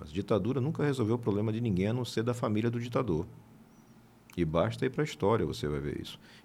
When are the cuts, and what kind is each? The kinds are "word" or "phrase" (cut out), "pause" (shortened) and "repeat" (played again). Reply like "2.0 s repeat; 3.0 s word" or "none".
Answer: none

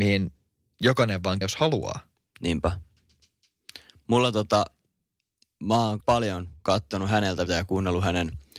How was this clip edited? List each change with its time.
1.4 s word; 6.0 s word; 7.5 s word

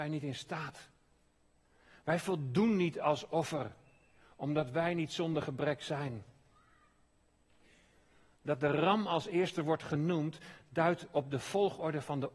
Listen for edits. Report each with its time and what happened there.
none

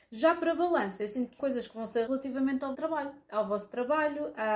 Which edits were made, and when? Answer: 1.4 s word; 2.1 s word; 2.7 s word

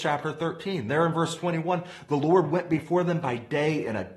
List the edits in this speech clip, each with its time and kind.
none

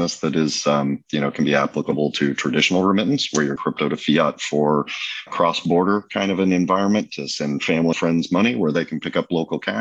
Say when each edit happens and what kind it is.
3.6 s word; 5.3 s word; 7.9 s word

